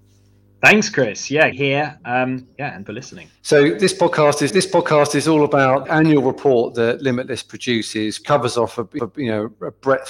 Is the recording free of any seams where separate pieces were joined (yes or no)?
no